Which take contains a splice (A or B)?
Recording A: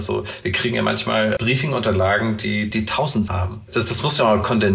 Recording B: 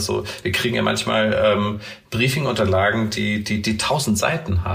A